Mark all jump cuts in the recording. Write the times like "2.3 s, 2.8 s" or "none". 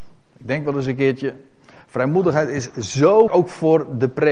3.3 s